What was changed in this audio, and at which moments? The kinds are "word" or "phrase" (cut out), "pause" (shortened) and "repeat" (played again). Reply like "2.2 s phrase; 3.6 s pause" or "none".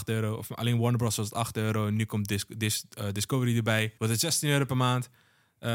4.0 s pause